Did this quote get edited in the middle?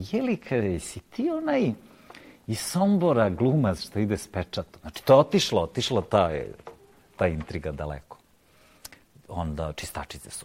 no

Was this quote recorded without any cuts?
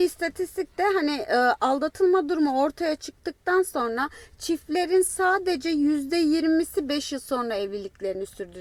yes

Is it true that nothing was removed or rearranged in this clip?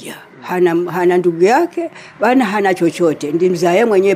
yes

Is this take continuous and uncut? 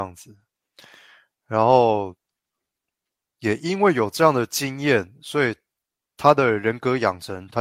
yes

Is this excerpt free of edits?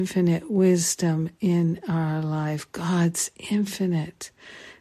yes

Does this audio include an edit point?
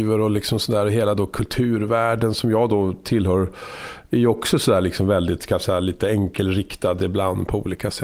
no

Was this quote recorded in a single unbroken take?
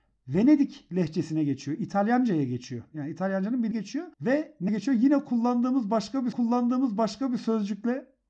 no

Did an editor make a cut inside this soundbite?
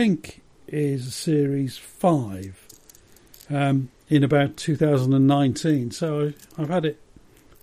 no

